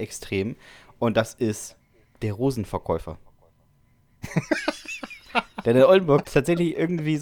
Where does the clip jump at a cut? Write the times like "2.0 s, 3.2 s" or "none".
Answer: 6.2 s